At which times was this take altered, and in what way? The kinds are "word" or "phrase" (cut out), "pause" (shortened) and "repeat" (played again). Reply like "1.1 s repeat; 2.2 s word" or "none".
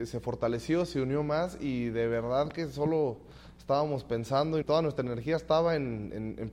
4.6 s word